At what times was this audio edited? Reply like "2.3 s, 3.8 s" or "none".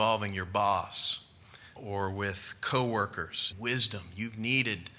1.8 s, 3.5 s